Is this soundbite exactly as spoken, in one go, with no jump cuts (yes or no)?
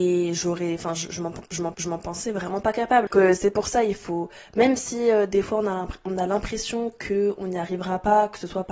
no